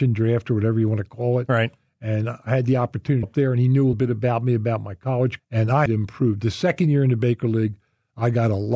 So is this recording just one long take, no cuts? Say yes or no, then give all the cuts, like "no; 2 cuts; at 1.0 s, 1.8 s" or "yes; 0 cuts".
no; 4 cuts; at 3.2 s, 3.9 s, 5.4 s, 5.9 s